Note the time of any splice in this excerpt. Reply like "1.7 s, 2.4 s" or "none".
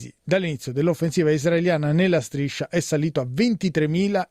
none